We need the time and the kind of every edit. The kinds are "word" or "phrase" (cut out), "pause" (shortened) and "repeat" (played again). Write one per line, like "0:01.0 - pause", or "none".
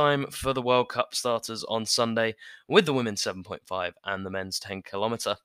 none